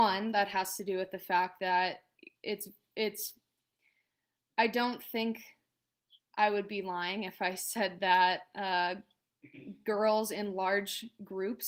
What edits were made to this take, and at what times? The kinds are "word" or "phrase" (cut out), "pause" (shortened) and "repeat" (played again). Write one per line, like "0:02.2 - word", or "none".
none

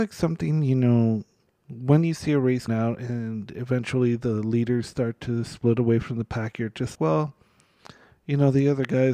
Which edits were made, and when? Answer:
0:02.7 - word
0:06.9 - word

